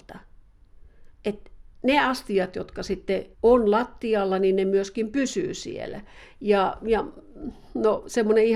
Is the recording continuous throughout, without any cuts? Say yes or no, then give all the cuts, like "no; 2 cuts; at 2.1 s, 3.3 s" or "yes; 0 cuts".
no; 1 cut; at 3.3 s